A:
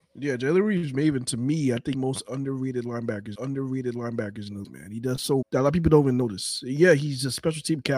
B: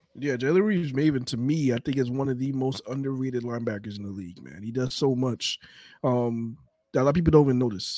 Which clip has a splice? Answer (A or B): A